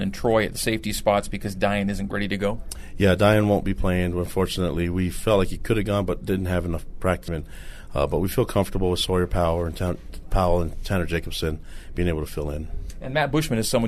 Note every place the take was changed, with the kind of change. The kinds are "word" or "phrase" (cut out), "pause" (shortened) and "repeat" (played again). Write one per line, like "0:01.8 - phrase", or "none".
0:02.1 - word
0:07.3 - word
0:10.2 - word